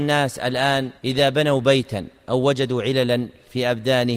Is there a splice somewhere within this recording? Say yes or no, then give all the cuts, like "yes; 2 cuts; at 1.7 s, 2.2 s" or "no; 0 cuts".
yes; 1 cut; at 1.0 s